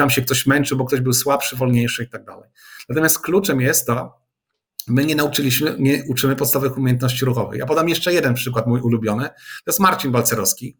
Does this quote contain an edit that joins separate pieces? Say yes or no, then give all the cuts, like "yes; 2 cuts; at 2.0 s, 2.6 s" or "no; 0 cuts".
no; 0 cuts